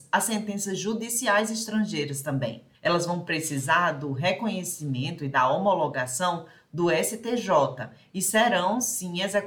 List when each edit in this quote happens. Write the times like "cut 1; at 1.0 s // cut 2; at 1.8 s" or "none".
cut 1; at 2.7 s